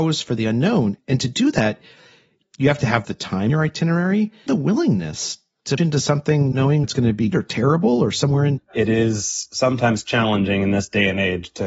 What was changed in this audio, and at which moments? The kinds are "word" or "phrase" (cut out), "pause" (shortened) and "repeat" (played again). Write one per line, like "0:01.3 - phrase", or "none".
0:03.0 - word
0:03.5 - word
0:04.5 - word
0:05.8 - word
0:06.5 - word
0:06.8 - word
0:07.3 - word
0:08.6 - word